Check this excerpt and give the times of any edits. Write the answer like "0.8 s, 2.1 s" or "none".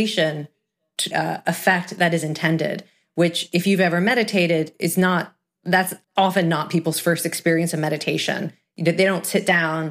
1.1 s, 6.0 s